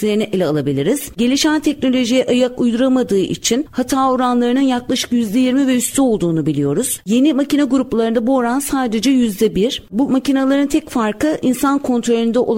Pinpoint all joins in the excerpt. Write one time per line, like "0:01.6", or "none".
none